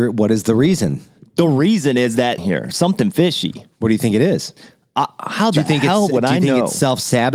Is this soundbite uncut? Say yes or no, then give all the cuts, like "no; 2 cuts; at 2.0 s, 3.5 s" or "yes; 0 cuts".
no; 1 cut; at 2.4 s